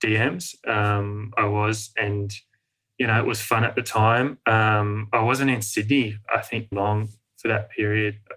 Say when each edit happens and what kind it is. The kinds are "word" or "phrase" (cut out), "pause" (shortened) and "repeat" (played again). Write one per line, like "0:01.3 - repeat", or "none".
0:06.7 - word